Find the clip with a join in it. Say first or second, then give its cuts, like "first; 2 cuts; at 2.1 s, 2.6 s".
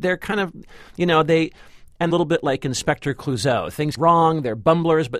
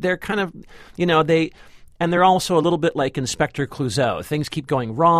first; 2 cuts; at 2.1 s, 4.0 s